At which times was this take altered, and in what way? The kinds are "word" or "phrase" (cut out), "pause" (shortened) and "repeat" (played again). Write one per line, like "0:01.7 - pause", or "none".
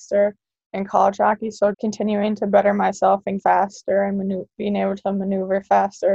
0:01.7 - word
0:03.4 - word